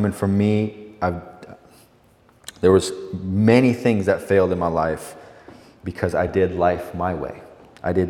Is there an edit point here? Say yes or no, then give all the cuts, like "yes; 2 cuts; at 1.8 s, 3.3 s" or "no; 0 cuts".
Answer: no; 0 cuts